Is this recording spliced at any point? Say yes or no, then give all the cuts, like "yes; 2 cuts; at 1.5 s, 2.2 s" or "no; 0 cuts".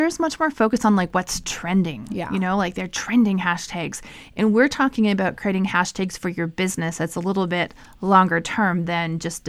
no; 0 cuts